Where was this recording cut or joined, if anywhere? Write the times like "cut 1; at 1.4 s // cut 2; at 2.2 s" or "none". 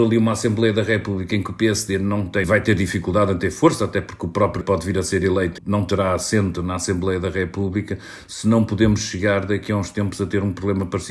cut 1; at 2.4 s // cut 2; at 4.6 s // cut 3; at 5.6 s